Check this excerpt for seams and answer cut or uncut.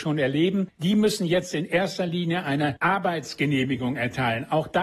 uncut